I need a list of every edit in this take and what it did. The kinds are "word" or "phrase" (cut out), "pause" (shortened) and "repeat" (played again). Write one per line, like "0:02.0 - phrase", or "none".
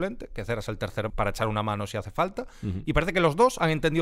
0:01.1 - word